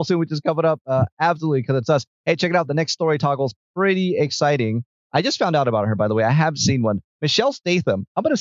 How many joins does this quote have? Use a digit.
0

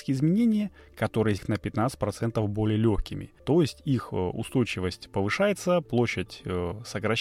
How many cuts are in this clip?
2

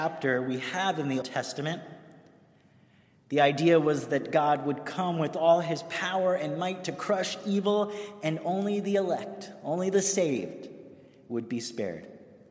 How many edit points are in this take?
1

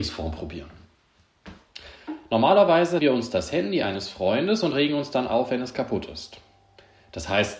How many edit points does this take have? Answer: 1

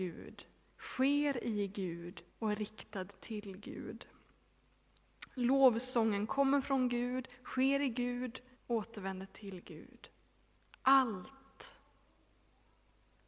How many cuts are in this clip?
2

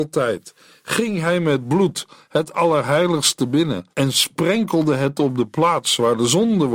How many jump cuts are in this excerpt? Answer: 1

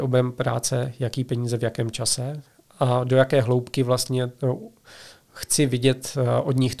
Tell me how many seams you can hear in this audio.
0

